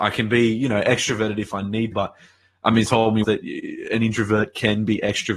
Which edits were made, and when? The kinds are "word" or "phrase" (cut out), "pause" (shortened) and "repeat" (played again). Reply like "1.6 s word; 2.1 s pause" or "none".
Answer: 1.9 s word; 2.9 s word; 3.2 s word